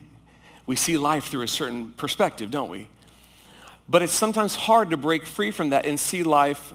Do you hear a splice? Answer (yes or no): no